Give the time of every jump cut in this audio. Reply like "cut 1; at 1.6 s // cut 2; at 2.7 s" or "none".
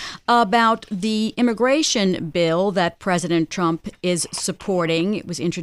none